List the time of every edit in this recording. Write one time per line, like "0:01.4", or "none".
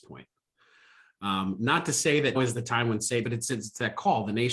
0:02.3
0:03.2